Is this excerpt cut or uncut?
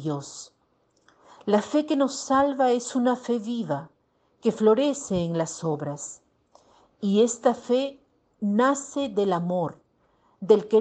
uncut